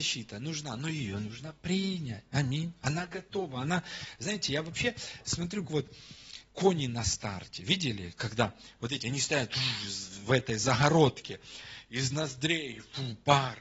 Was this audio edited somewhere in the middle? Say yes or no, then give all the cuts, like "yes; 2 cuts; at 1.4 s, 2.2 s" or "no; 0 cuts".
yes; 3 cuts; at 2.3 s, 5.6 s, 9.0 s